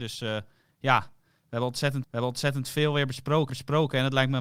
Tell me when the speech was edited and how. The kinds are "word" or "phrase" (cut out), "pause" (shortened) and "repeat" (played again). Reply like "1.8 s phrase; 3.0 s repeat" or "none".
2.0 s repeat; 3.5 s repeat